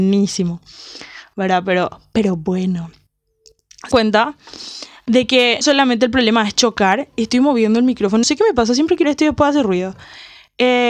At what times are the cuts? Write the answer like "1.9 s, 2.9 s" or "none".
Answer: 3.9 s, 5.6 s, 8.2 s, 9.0 s